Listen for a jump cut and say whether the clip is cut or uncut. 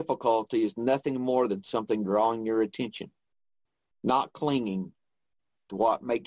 uncut